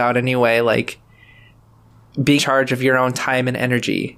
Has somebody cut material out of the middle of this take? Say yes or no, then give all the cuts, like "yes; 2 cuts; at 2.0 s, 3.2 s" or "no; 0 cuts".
yes; 1 cut; at 2.4 s